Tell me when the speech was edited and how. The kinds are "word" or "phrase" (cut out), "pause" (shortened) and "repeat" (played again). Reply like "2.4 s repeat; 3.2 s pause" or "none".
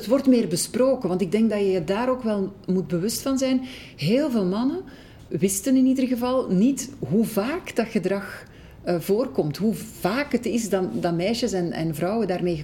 5.3 s word